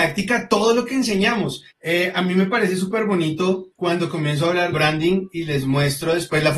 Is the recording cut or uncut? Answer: cut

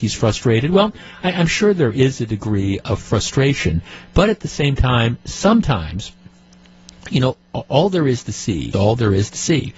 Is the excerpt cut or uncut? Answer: cut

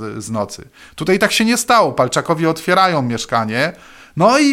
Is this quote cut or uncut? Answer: uncut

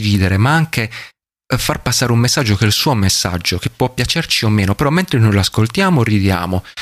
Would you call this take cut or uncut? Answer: uncut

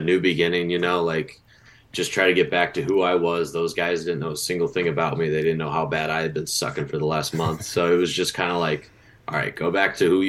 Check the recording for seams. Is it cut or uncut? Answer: uncut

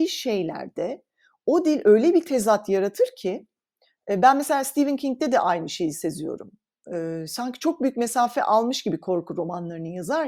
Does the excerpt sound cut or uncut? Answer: uncut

